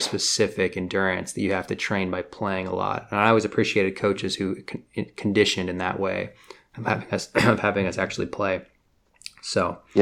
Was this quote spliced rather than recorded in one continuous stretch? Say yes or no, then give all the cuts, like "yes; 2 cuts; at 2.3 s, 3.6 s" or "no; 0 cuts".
no; 0 cuts